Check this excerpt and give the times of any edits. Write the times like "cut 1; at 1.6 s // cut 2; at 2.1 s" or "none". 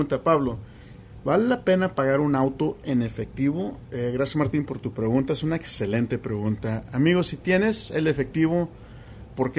none

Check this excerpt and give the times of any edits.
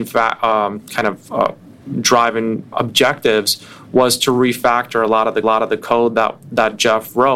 cut 1; at 2.7 s // cut 2; at 5.4 s

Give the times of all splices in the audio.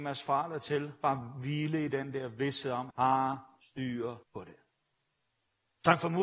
cut 1; at 2.9 s // cut 2; at 4.2 s

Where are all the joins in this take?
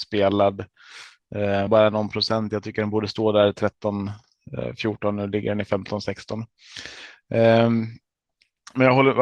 cut 1; at 1.7 s

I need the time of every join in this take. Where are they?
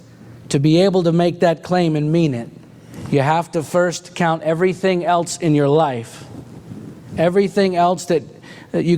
none

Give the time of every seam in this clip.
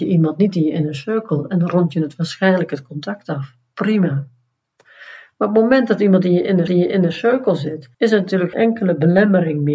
cut 1; at 6.7 s // cut 2; at 7.9 s // cut 3; at 8.5 s

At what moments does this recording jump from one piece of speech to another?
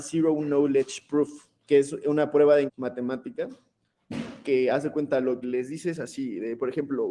cut 1; at 1.6 s // cut 2; at 2.7 s // cut 3; at 5.4 s

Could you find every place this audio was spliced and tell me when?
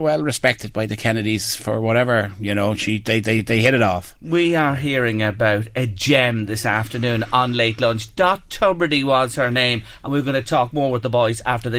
none

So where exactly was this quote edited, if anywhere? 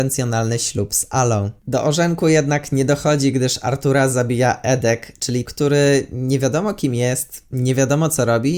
cut 1; at 1.6 s // cut 2; at 5.5 s

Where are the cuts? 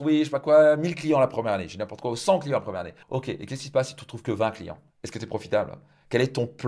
cut 1; at 3.0 s // cut 2; at 4.9 s

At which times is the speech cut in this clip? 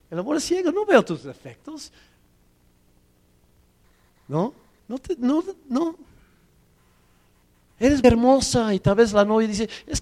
cut 1; at 8.0 s

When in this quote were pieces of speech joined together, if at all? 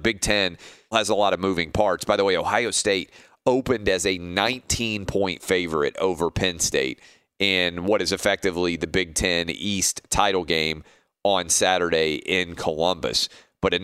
cut 1; at 0.9 s

